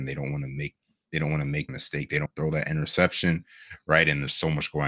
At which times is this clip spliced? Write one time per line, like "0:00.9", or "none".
0:01.7
0:02.3